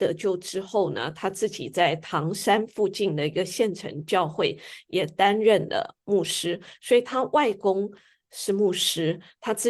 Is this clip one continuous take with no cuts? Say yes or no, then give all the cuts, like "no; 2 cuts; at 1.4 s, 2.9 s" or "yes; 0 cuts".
yes; 0 cuts